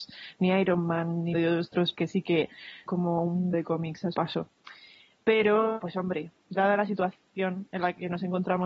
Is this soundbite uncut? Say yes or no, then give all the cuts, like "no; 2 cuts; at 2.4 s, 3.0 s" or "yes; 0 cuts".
no; 6 cuts; at 1.3 s, 1.9 s, 2.9 s, 3.5 s, 4.1 s, 5.8 s